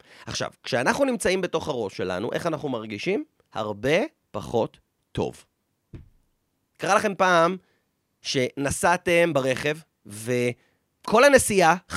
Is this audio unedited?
yes; 0 cuts

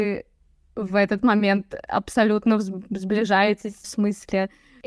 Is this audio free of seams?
no; 1 cut; at 3.8 s

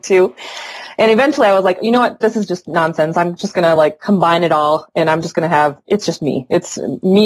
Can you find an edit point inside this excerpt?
no; 0 cuts

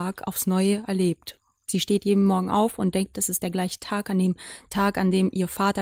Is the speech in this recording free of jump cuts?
yes; 0 cuts

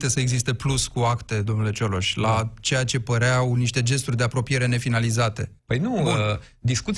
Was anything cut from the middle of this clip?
yes; 1 cut; at 5.6 s

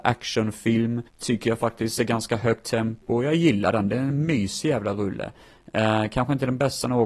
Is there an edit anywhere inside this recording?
yes; 1 cut; at 1.1 s

